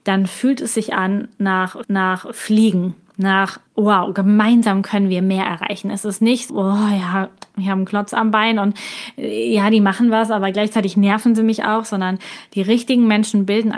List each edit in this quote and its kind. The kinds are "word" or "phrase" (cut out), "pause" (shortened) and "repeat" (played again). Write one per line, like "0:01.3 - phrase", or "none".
0:01.8 - repeat
0:03.7 - pause
0:06.5 - word